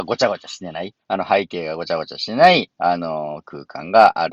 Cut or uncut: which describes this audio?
cut